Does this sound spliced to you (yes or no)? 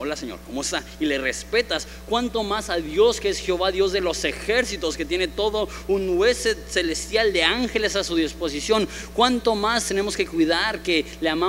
no